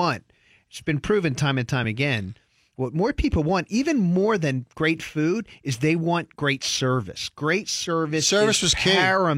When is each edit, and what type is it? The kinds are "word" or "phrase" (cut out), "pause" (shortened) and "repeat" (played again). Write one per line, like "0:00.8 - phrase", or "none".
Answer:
none